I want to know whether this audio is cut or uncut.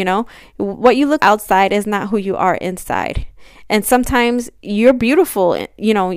cut